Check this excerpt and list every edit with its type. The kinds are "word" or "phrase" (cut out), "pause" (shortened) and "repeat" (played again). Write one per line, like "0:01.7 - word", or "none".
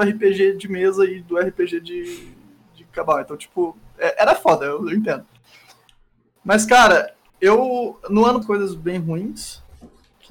0:08.4 - phrase